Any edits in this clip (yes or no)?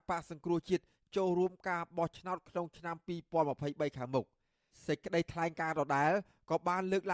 no